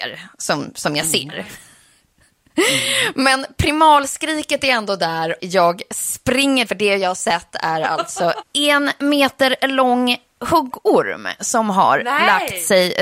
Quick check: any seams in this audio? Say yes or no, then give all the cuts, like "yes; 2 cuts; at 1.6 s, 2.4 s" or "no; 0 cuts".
yes; 3 cuts; at 5.4 s, 6.7 s, 8.4 s